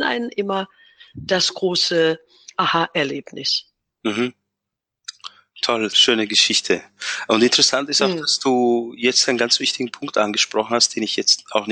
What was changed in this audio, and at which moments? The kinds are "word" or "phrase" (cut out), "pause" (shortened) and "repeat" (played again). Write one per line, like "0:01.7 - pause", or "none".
0:05.9 - word